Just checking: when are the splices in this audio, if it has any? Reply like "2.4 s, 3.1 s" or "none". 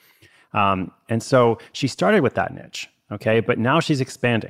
none